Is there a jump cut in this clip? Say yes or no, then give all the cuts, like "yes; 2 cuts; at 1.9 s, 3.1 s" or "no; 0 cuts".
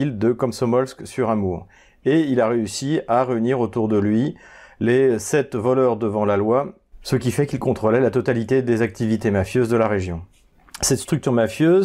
no; 0 cuts